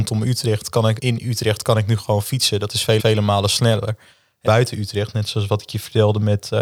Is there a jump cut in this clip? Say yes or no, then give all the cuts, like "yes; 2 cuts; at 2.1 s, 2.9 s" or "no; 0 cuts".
yes; 3 cuts; at 1.0 s, 3.0 s, 4.5 s